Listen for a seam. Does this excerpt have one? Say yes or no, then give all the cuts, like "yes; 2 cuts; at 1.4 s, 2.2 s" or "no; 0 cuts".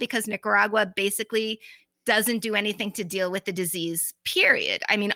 no; 0 cuts